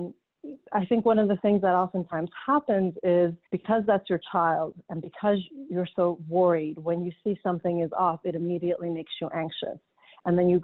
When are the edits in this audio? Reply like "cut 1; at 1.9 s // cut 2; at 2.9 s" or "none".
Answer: cut 1; at 3.4 s